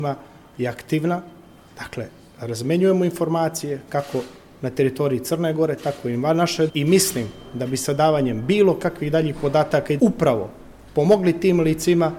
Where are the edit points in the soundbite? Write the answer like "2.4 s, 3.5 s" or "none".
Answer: 6.7 s, 10.0 s